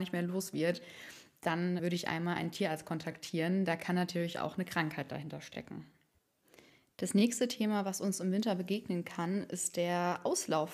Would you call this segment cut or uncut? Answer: cut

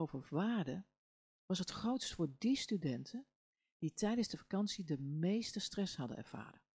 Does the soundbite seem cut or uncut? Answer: uncut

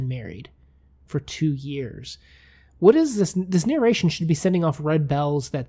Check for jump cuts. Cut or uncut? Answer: uncut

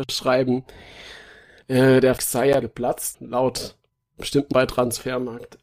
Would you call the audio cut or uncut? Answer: cut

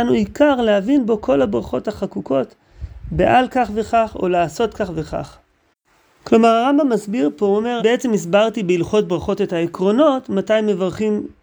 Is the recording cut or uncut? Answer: cut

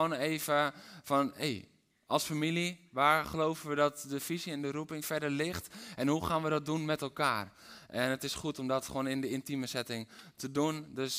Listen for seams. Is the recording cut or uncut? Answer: uncut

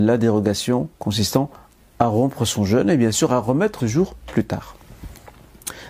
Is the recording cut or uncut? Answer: cut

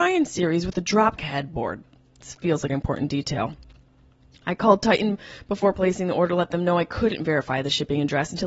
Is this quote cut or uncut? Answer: cut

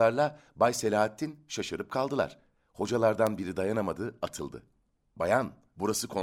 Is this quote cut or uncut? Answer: uncut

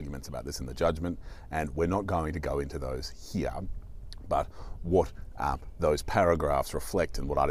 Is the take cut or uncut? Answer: uncut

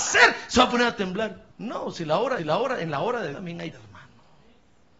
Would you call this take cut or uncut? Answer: cut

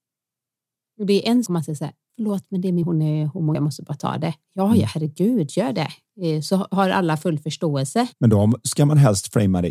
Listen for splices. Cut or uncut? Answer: cut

